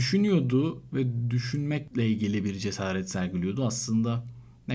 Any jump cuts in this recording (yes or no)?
no